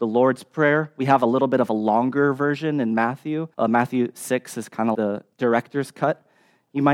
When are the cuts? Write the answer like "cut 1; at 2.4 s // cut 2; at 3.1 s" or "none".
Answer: cut 1; at 3.5 s // cut 2; at 4.9 s // cut 3; at 5.3 s